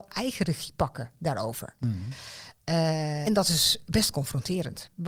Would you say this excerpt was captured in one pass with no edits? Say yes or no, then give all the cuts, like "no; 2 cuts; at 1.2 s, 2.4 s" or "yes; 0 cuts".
no; 1 cut; at 3.2 s